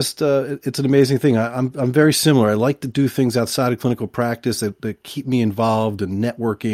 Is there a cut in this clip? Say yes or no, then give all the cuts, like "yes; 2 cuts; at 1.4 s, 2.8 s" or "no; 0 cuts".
no; 0 cuts